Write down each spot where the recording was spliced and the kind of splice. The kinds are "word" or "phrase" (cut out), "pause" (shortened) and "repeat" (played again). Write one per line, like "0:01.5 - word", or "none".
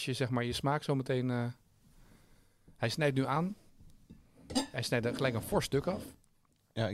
none